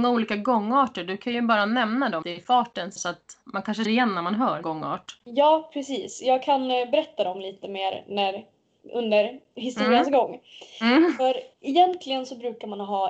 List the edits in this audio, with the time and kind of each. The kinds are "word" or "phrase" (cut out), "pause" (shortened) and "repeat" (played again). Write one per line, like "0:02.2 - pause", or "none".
0:02.2 - word
0:03.0 - word
0:03.4 - pause
0:03.8 - word
0:04.6 - word
0:11.5 - pause